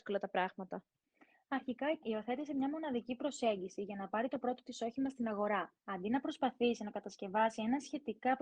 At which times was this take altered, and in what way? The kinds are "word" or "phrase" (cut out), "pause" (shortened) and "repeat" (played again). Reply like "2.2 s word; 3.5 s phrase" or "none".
1.0 s pause; 2.0 s word; 5.8 s pause